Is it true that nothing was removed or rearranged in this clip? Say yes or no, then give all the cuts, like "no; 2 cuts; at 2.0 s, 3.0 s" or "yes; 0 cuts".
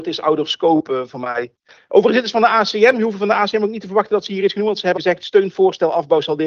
no; 1 cut; at 5.0 s